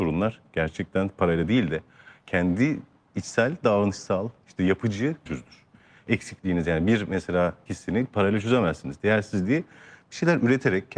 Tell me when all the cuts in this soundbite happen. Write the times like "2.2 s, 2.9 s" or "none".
5.3 s, 7.7 s

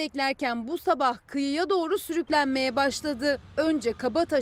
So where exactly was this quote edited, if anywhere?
none

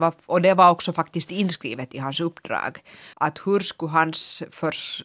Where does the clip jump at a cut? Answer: 3.1 s

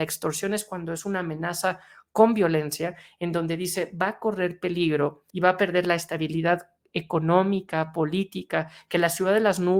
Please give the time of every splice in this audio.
5.3 s

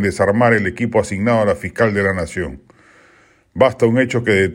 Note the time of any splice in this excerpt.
none

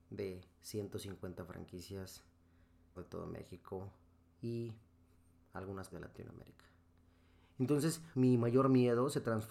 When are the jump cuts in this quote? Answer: 3.0 s, 5.9 s, 8.1 s

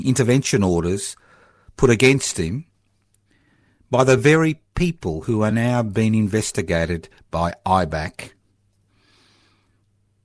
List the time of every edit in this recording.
none

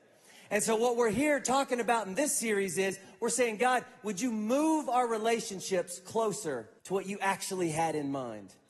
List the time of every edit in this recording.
6.8 s

